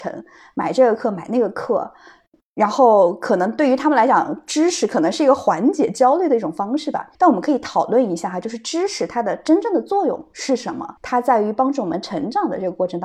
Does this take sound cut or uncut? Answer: cut